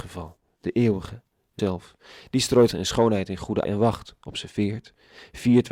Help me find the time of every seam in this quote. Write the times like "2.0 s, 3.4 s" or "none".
1.6 s, 2.7 s, 3.7 s